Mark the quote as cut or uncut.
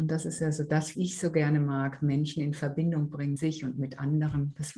cut